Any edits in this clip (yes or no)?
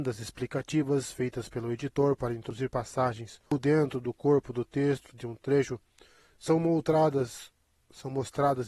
yes